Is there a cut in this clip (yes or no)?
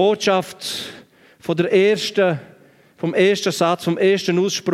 no